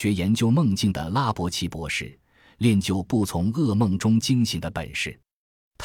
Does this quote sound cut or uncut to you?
uncut